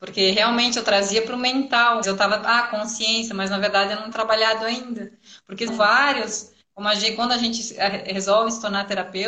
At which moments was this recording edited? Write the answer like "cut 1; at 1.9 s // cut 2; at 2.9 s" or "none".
cut 1; at 2.0 s // cut 2; at 4.1 s // cut 3; at 5.7 s